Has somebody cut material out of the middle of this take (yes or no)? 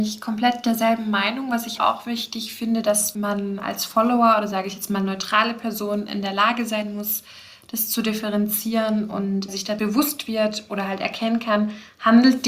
yes